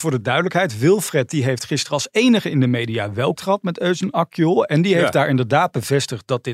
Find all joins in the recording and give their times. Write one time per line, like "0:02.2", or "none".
0:03.4

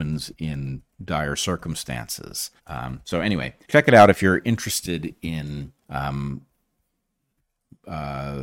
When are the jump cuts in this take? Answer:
0:02.6
0:03.6
0:05.8

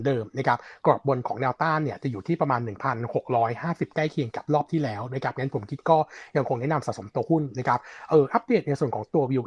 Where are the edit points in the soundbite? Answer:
0:03.9

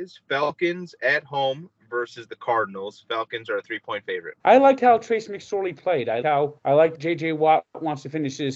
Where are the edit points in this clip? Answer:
0:04.4
0:06.2
0:06.6
0:06.9

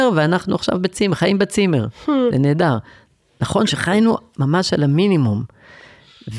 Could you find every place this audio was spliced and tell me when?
none

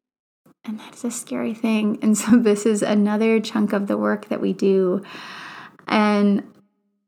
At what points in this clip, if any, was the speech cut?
none

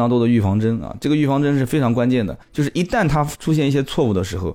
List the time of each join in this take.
0:02.4

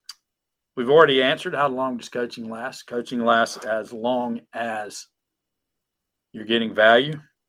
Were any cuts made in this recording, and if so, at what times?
none

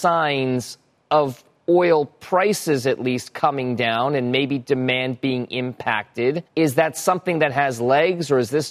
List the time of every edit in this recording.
0:06.5

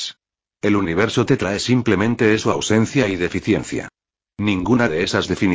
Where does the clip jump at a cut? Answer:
none

